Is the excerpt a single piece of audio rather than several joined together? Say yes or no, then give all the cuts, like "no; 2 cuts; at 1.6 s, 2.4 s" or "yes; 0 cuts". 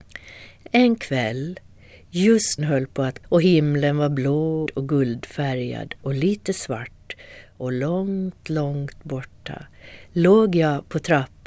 no; 3 cuts; at 2.6 s, 3.2 s, 4.7 s